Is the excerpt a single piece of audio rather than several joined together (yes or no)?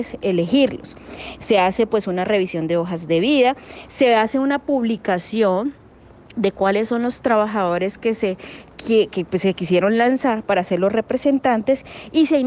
yes